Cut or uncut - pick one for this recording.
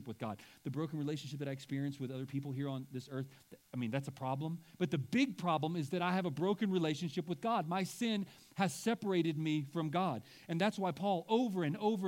uncut